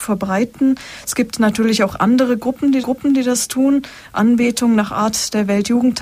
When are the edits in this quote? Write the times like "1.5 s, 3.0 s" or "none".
2.8 s